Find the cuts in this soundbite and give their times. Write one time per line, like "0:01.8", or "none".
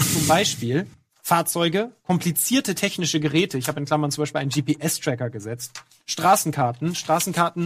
0:00.9